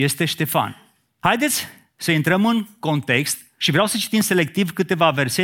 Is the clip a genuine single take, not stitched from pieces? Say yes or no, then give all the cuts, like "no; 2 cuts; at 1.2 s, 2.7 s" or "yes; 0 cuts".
yes; 0 cuts